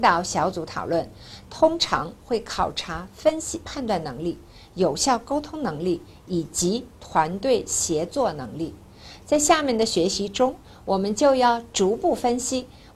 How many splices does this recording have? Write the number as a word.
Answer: zero